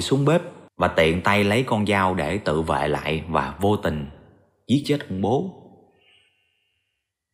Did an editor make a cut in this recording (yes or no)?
no